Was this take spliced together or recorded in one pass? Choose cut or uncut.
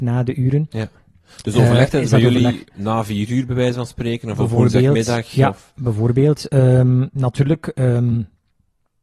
uncut